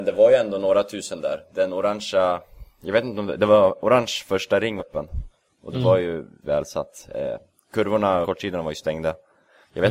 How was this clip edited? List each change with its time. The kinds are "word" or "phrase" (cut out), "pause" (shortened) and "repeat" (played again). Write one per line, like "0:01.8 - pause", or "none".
0:04.8 - word
0:06.4 - word
0:08.2 - word

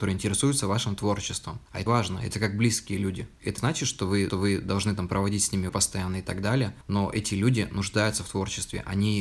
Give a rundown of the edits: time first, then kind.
0:01.9 - word
0:03.6 - word
0:04.3 - repeat
0:05.7 - word

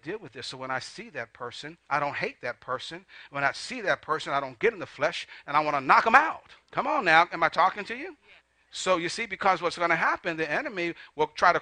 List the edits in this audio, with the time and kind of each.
0:01.8 - pause
0:06.6 - pause
0:08.4 - pause

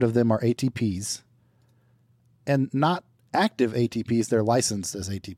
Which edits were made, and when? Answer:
none

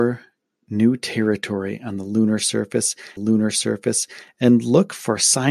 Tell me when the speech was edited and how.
0:03.2 - repeat

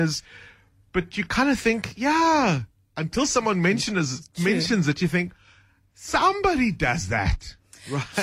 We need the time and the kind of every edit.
none

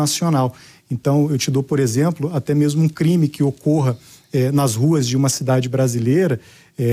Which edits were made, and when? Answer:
none

